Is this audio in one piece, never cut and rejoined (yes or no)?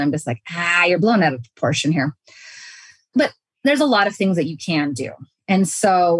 yes